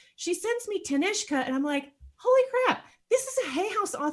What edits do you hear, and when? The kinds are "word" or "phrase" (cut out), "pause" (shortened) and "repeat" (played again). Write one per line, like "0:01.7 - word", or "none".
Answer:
none